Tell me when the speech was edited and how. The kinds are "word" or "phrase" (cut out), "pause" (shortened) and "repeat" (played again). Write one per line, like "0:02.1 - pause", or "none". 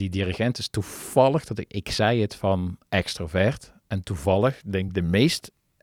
none